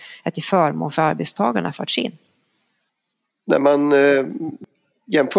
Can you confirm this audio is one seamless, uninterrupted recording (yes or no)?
yes